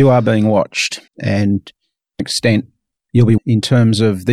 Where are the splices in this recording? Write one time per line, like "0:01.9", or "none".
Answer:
0:01.1
0:02.2
0:03.4